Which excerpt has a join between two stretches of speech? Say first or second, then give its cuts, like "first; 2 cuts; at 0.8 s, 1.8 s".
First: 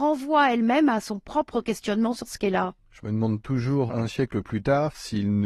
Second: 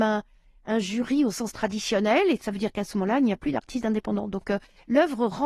first; 2 cuts; at 2.8 s, 3.9 s